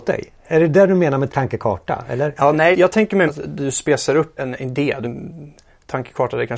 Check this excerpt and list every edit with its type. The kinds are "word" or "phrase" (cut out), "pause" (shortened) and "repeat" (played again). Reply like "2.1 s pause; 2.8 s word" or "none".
1.3 s word; 2.7 s word; 3.3 s word; 4.4 s word; 5.0 s word